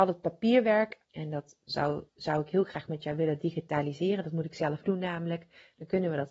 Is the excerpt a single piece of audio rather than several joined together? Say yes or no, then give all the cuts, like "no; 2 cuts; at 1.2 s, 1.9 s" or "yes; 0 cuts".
no; 3 cuts; at 1.0 s, 2.1 s, 4.8 s